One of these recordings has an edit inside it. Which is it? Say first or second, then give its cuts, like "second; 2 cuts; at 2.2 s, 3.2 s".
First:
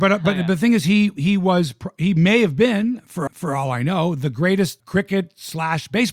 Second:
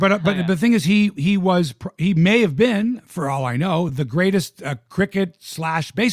first; 2 cuts; at 3.3 s, 4.8 s